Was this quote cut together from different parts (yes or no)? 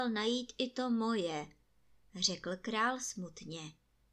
no